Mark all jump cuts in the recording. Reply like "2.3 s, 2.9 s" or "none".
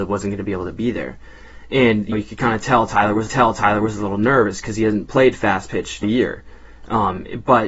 2.1 s, 3.3 s, 6.0 s